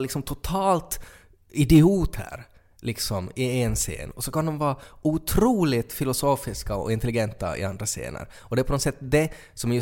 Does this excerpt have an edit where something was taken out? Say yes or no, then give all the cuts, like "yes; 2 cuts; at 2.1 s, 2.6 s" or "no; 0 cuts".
no; 0 cuts